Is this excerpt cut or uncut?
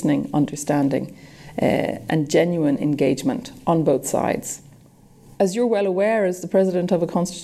uncut